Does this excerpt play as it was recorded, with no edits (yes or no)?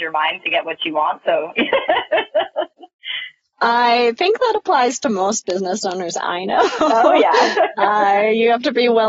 yes